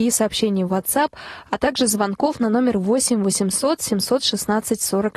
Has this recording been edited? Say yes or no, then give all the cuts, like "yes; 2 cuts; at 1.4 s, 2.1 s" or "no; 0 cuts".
no; 0 cuts